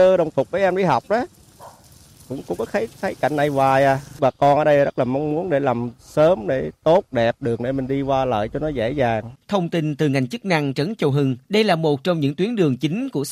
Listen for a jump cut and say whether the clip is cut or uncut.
cut